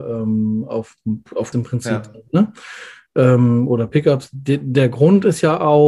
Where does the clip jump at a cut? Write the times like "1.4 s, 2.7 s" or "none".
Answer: 1.5 s